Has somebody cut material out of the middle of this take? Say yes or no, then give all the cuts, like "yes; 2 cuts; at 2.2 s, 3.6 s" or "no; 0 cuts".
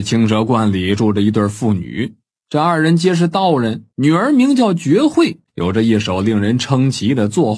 yes; 3 cuts; at 2.3 s, 3.9 s, 5.5 s